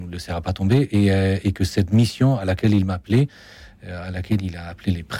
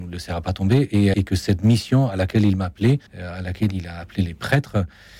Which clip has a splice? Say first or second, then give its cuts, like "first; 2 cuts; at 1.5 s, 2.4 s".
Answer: second; 2 cuts; at 1.1 s, 3.1 s